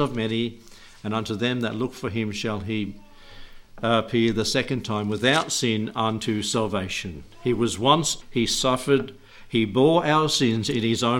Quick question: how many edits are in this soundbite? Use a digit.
1